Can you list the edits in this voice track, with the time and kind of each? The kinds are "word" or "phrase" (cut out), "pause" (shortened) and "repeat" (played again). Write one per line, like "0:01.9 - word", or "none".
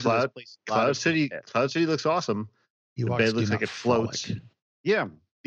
none